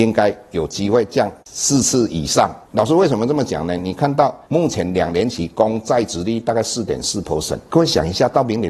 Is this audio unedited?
no; 3 cuts; at 1.4 s, 2.6 s, 4.4 s

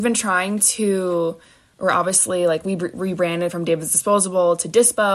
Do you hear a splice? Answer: no; 0 cuts

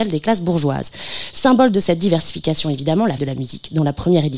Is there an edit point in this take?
yes; 1 cut; at 3.2 s

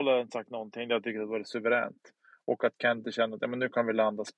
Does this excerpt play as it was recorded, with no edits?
yes; 0 cuts

